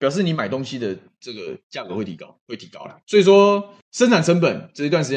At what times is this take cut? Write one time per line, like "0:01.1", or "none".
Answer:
0:03.0
0:03.8